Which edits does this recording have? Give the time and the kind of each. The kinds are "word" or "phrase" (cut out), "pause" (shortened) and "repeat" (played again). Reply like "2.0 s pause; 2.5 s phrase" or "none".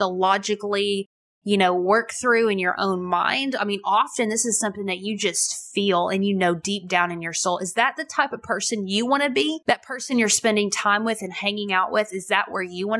none